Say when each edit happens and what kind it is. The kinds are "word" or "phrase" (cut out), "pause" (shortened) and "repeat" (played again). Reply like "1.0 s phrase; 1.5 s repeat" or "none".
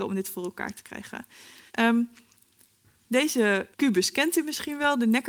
1.7 s pause; 3.7 s pause